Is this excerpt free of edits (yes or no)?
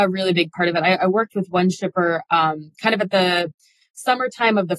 yes